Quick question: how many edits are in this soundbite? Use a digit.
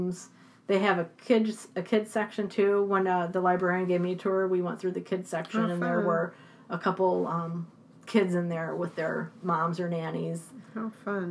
0